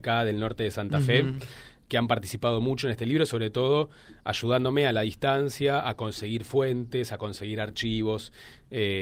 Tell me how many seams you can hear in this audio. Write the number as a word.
zero